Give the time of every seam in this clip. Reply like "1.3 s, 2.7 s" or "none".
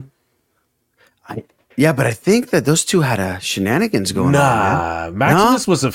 none